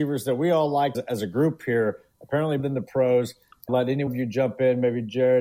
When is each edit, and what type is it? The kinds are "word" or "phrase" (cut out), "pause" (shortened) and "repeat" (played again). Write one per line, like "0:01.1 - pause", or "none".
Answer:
0:00.9 - word
0:02.6 - word
0:03.7 - word
0:04.1 - word